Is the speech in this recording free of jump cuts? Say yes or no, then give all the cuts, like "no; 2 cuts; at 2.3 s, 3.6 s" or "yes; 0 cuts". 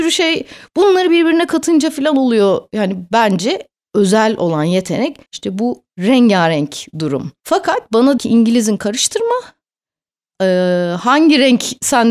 no; 4 cuts; at 5.3 s, 7.4 s, 8.2 s, 8.8 s